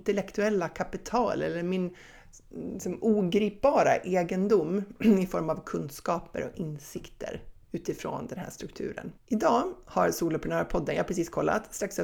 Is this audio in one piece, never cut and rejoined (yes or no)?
no